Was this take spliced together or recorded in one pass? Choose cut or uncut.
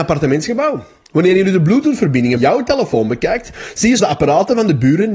cut